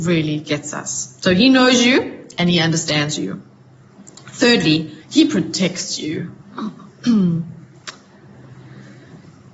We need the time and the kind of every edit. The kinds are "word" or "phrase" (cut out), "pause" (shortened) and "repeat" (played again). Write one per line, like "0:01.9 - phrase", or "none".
0:05.0 - pause
0:06.4 - pause